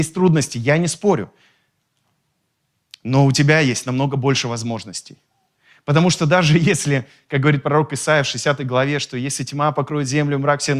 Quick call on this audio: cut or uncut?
uncut